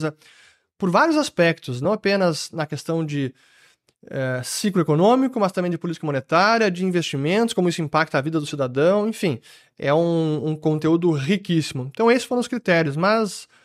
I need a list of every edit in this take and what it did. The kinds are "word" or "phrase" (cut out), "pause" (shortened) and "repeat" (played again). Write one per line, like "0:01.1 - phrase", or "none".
none